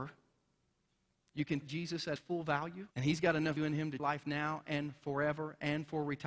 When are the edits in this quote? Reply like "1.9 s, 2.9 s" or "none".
1.6 s, 2.2 s, 2.9 s, 3.6 s, 4.0 s